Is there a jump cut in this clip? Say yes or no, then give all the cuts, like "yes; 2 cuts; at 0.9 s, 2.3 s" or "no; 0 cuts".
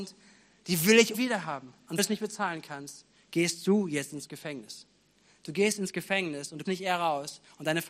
yes; 3 cuts; at 1.1 s, 2.0 s, 6.6 s